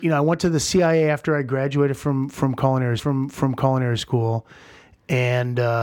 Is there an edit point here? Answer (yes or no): yes